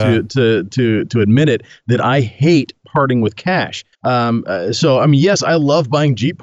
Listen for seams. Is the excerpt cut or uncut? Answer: cut